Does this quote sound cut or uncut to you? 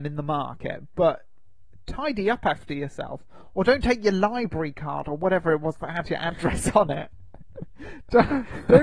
uncut